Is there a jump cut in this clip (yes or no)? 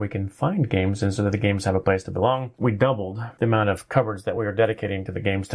no